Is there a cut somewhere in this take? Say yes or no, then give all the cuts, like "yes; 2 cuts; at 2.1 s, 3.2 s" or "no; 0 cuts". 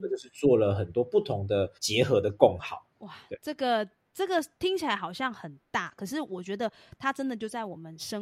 yes; 2 cuts; at 1.8 s, 2.9 s